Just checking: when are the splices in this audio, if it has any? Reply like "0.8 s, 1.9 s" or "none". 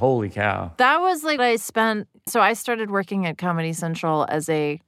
1.4 s, 2.3 s